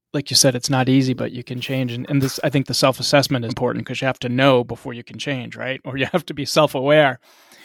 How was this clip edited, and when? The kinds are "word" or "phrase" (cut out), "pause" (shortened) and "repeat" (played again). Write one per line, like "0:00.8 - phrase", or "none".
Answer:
0:03.5 - word